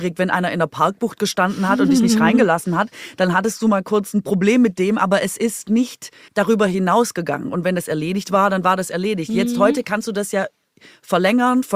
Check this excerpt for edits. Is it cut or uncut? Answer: cut